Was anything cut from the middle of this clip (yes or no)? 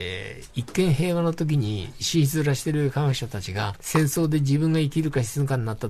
yes